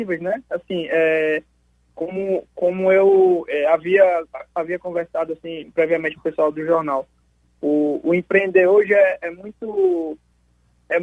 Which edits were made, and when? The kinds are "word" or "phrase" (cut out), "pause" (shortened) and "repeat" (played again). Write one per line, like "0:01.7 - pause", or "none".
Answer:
none